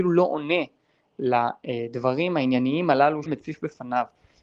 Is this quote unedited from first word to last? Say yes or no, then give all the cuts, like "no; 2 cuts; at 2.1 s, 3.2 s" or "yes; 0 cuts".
no; 1 cut; at 3.3 s